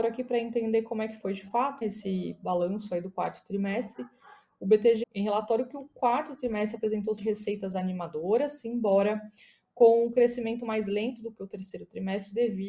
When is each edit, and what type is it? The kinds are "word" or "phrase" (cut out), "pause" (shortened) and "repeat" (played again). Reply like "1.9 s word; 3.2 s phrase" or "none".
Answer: 1.8 s word; 5.0 s word; 7.2 s word